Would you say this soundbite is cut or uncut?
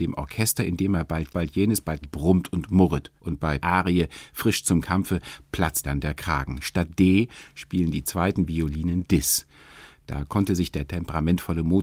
cut